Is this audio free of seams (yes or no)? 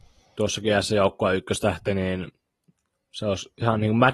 yes